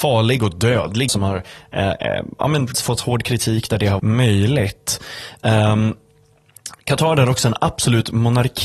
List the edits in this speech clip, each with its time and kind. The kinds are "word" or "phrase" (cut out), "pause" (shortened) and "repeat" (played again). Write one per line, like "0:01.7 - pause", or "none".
0:01.1 - word
0:02.7 - word
0:04.0 - word